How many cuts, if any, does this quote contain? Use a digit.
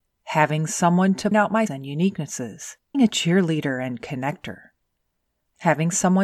3